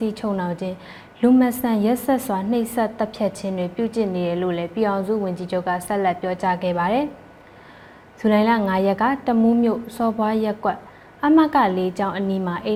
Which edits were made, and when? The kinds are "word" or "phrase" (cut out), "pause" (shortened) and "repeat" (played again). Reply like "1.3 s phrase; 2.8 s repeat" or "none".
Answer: none